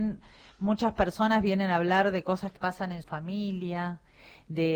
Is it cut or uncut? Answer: cut